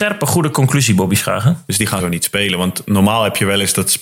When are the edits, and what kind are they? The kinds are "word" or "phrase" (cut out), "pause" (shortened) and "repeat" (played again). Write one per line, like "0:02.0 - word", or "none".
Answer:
0:02.0 - word